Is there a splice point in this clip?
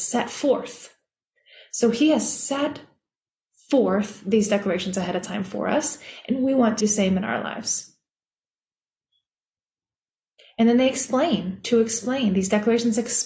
yes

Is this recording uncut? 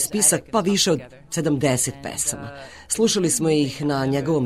yes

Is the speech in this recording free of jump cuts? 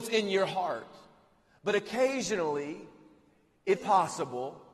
no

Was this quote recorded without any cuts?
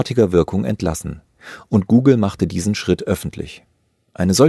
yes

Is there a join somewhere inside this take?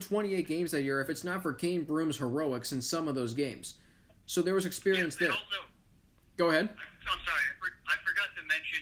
no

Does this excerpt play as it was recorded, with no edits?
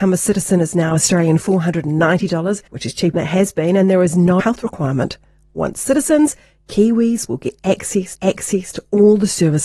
no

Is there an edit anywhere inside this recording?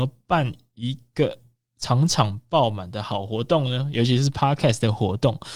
no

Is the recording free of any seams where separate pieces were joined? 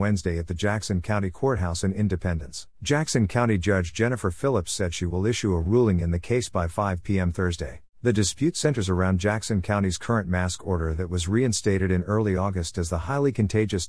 no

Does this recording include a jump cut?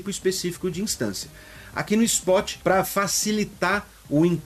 no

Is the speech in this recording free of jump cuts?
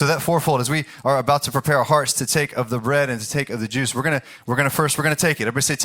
yes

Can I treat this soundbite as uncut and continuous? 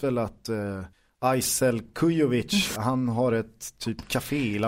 no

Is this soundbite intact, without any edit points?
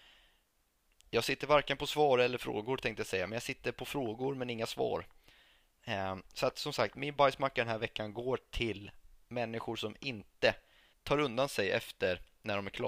no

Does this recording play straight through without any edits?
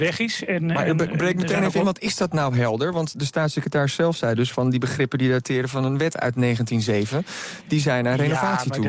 yes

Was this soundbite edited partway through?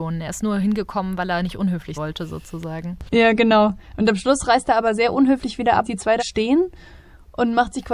yes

